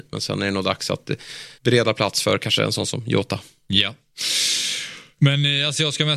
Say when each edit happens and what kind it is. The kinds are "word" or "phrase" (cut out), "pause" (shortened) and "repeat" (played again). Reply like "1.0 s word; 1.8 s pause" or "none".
1.6 s pause